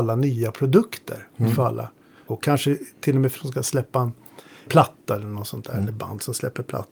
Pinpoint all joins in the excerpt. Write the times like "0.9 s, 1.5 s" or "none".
2.3 s, 3.4 s, 4.7 s